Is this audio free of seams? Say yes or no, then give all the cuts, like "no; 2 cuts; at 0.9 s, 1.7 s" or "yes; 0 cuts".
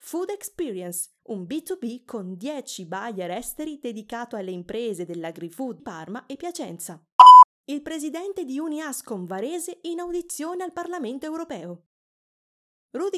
no; 2 cuts; at 1.2 s, 5.8 s